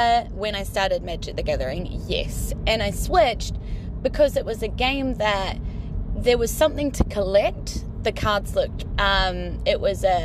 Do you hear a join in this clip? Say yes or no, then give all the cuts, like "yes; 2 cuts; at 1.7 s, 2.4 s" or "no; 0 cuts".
yes; 1 cut; at 8.9 s